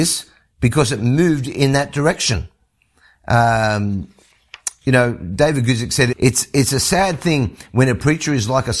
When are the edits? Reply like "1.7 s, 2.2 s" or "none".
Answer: 6.1 s